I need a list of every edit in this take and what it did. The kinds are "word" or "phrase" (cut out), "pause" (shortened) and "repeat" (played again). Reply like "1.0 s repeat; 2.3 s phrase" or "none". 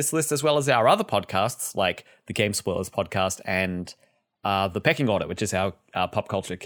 none